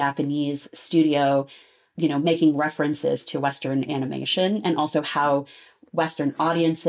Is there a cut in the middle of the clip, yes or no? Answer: no